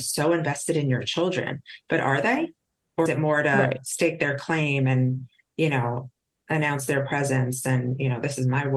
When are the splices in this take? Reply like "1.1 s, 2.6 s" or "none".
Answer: 3.1 s